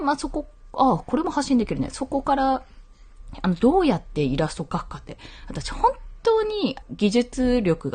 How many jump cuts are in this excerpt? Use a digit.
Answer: 1